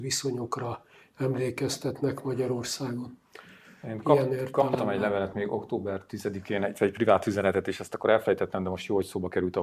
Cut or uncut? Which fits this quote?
uncut